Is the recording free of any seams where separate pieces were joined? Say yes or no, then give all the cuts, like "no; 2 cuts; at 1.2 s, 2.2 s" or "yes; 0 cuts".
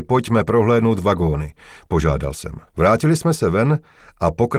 no; 1 cut; at 2.7 s